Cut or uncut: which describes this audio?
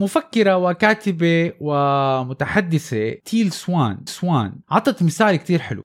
cut